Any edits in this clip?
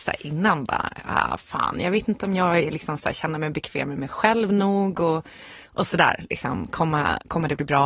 no; 0 cuts

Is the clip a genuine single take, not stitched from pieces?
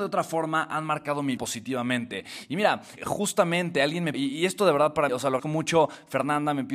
no; 5 cuts; at 1.4 s, 3.0 s, 4.1 s, 5.1 s, 5.4 s

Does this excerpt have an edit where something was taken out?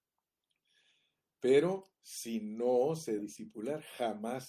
yes; 2 cuts; at 1.9 s, 3.2 s

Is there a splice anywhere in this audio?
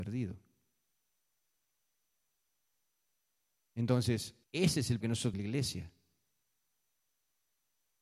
yes; 3 cuts; at 4.4 s, 5.0 s, 5.3 s

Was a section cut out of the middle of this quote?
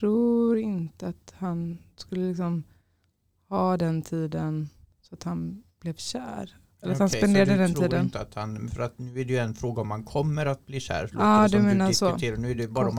no; 0 cuts

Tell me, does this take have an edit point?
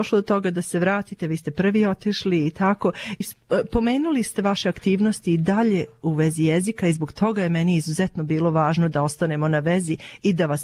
yes; 1 cut; at 3.2 s

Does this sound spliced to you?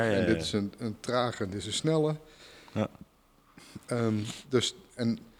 no; 0 cuts

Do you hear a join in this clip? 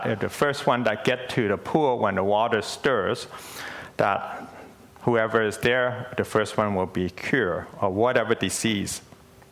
no; 0 cuts

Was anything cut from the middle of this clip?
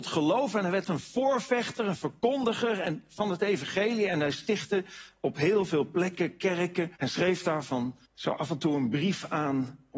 yes; 2 cuts; at 7.0 s, 8.1 s

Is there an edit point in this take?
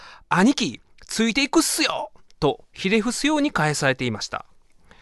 no; 0 cuts

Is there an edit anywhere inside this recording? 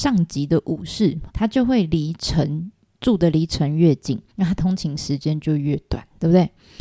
yes; 2 cuts; at 1.3 s, 4.3 s

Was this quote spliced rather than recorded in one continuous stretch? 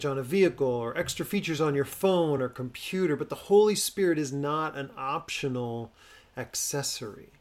no; 0 cuts

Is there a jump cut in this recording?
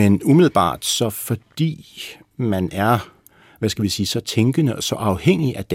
no; 0 cuts

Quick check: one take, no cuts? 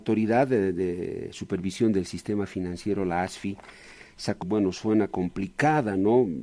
no; 1 cut; at 4.4 s

